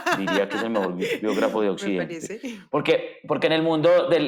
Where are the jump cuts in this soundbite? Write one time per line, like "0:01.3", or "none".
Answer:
none